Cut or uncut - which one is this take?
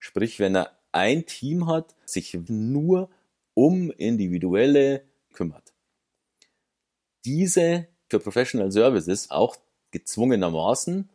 cut